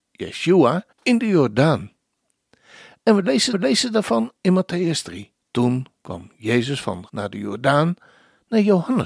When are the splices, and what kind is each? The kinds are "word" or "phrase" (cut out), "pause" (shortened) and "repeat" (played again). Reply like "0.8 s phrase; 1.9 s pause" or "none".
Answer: 0.9 s pause; 3.5 s repeat; 5.4 s pause; 7.1 s word

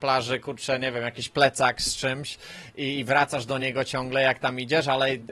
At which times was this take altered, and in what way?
none

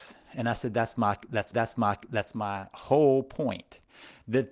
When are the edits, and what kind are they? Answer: 1.5 s repeat

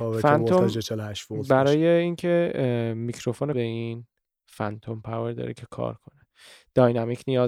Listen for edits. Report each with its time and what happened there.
3.5 s phrase

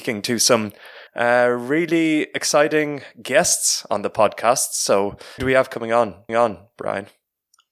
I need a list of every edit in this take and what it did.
1.1 s pause; 5.4 s word; 6.3 s repeat

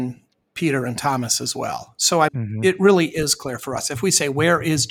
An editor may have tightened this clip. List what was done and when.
2.3 s word

